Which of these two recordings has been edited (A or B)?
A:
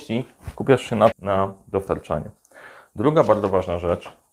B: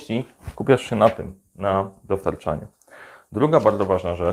A